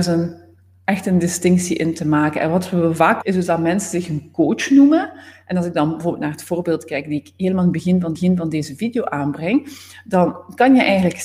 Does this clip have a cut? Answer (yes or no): yes